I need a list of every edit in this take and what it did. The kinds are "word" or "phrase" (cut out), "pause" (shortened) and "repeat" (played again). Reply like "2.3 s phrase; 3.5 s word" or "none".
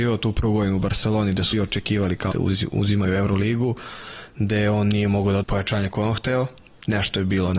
1.5 s word; 2.3 s word; 5.4 s word